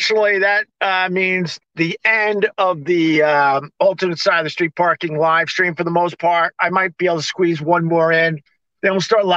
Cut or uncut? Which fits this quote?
uncut